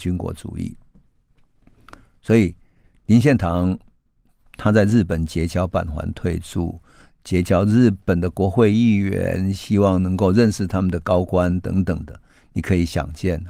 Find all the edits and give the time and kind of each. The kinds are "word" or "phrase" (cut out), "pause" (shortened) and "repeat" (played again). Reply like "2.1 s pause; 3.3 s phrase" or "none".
none